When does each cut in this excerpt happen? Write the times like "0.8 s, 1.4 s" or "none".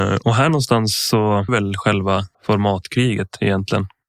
1.5 s, 2.3 s